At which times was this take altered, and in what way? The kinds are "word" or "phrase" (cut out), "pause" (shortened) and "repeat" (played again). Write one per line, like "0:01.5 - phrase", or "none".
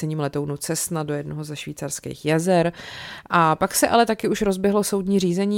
none